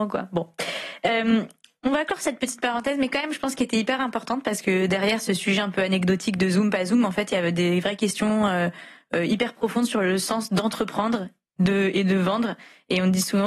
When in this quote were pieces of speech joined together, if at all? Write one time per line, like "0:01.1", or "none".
none